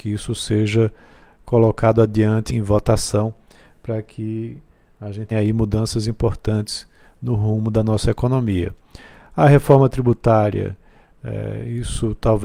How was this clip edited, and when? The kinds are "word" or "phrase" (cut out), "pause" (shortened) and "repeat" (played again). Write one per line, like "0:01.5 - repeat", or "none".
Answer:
0:02.5 - word
0:05.3 - word